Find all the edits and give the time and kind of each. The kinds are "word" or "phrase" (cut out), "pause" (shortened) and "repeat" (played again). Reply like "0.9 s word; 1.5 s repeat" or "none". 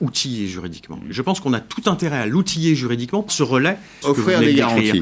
3.3 s word; 4.0 s phrase